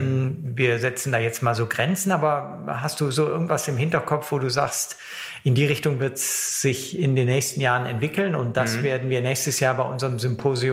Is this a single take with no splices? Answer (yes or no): yes